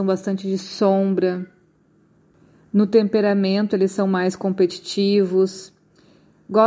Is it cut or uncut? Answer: uncut